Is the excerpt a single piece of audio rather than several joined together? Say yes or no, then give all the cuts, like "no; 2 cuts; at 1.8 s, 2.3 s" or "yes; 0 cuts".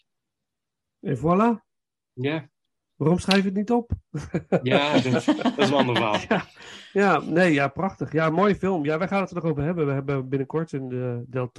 yes; 0 cuts